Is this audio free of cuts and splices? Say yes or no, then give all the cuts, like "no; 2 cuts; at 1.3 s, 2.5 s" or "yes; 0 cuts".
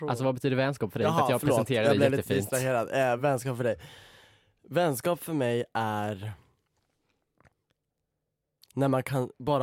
yes; 0 cuts